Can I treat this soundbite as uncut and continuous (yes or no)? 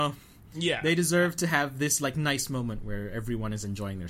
yes